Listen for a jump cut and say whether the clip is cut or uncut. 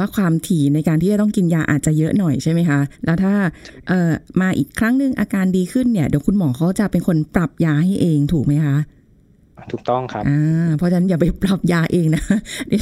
cut